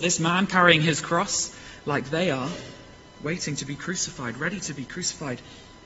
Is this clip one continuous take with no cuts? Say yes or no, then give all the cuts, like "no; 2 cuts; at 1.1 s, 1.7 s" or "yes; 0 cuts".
yes; 0 cuts